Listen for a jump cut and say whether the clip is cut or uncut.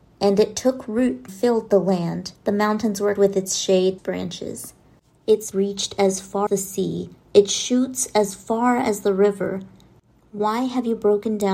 cut